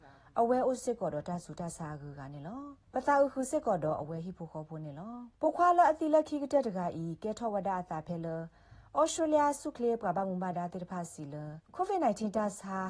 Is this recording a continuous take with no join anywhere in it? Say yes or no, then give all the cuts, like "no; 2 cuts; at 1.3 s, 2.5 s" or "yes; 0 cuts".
no; 3 cuts; at 2.8 s, 5.3 s, 11.6 s